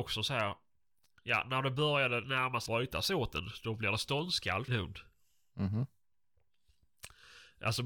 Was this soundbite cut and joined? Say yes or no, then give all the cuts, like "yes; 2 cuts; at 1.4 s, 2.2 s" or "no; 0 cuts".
yes; 2 cuts; at 2.7 s, 4.7 s